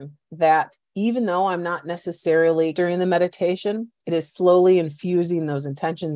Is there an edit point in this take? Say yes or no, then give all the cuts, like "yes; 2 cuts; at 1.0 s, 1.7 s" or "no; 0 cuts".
yes; 2 cuts; at 2.7 s, 4.0 s